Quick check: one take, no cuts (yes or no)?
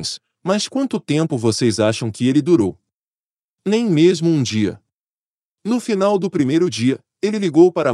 yes